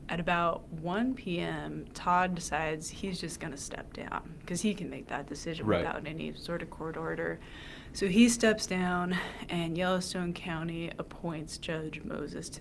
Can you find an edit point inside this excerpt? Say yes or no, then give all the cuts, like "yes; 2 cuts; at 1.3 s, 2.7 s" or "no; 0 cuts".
no; 0 cuts